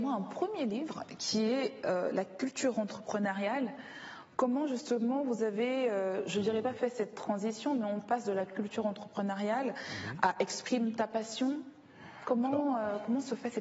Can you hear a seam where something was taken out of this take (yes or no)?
no